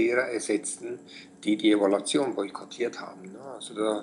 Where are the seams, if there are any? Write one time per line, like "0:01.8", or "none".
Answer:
none